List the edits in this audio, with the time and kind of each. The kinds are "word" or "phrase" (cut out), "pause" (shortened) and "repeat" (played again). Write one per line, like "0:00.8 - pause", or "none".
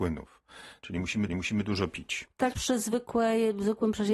0:01.3 - repeat
0:02.5 - word